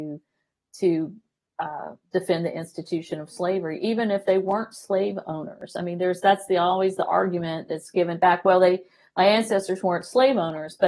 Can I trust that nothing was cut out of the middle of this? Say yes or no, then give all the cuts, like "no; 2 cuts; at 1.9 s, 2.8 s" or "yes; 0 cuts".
yes; 0 cuts